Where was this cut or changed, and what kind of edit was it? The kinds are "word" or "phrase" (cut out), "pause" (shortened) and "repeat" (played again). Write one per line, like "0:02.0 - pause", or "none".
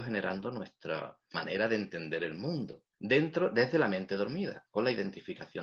0:01.3 - word
0:02.9 - pause